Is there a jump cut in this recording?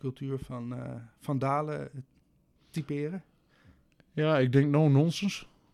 no; 0 cuts

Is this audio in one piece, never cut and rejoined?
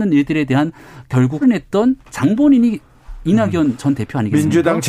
no; 2 cuts; at 1.4 s, 2.0 s

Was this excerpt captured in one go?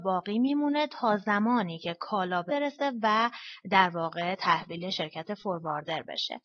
no; 1 cut; at 2.5 s

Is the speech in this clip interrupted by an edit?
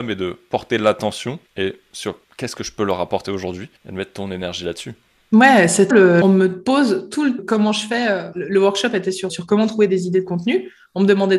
yes; 9 cuts; at 1.5 s, 2.2 s, 3.8 s, 5.1 s, 5.9 s, 6.2 s, 7.4 s, 8.3 s, 9.3 s

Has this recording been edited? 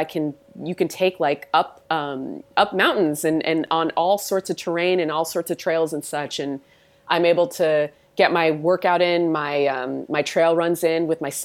yes; 1 cut; at 1.9 s

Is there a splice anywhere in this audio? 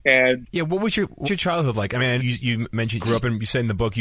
yes; 3 cuts; at 1.2 s, 2.2 s, 3.0 s

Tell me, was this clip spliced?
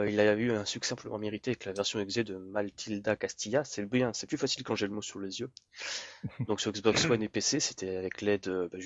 no; 0 cuts

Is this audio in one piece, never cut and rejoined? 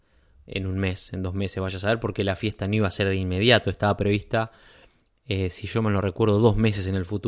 yes; 0 cuts

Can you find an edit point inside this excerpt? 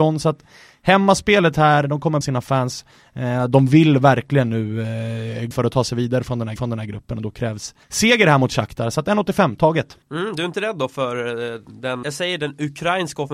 yes; 7 cuts; at 2.2 s, 5.5 s, 6.6 s, 7.8 s, 10.0 s, 10.5 s, 12.0 s

